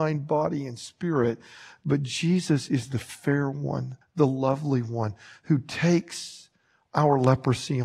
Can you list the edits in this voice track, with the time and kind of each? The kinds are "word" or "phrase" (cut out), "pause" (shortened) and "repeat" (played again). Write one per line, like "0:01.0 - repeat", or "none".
0:04.0 - pause